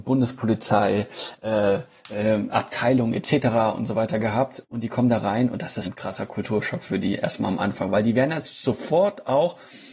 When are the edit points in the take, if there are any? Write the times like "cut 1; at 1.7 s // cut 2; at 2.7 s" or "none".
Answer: cut 1; at 5.8 s

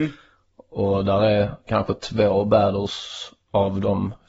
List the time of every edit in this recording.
cut 1; at 2.0 s

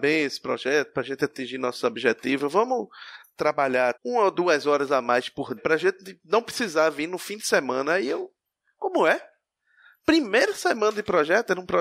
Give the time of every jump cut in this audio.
cut 1; at 3.9 s // cut 2; at 5.6 s

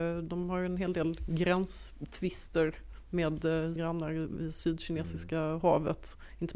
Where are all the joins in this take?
cut 1; at 3.8 s

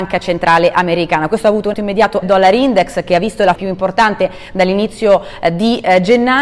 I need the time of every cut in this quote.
cut 1; at 1.7 s // cut 2; at 2.2 s // cut 3; at 3.6 s

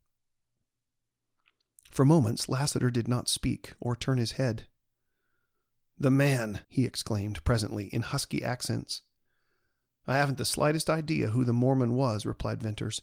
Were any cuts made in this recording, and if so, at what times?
cut 1; at 6.6 s

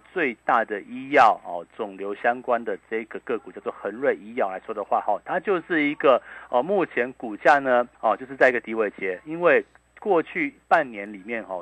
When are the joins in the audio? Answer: cut 1; at 7.9 s

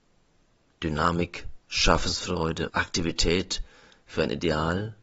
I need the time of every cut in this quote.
cut 1; at 2.7 s

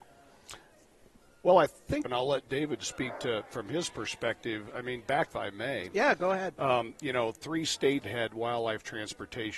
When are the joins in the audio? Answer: cut 1; at 2.0 s // cut 2; at 5.3 s // cut 3; at 8.0 s

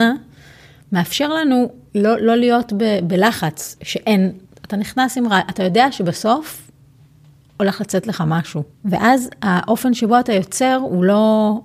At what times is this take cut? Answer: cut 1; at 1.9 s // cut 2; at 3.8 s // cut 3; at 4.5 s // cut 4; at 8.7 s

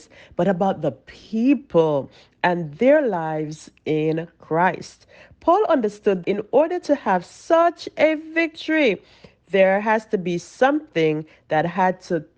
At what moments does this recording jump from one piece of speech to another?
cut 1; at 6.2 s

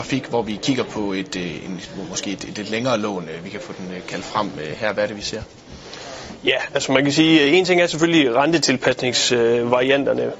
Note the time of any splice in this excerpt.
none

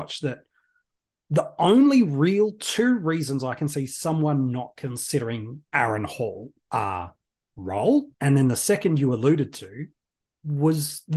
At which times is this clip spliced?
cut 1; at 5.7 s // cut 2; at 6.6 s // cut 3; at 8.1 s

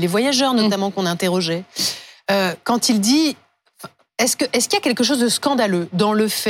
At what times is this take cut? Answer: none

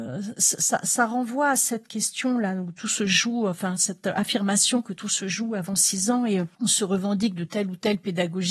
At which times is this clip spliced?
cut 1; at 6.5 s

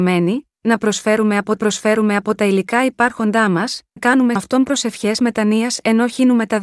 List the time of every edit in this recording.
cut 1; at 1.6 s // cut 2; at 4.0 s // cut 3; at 4.4 s

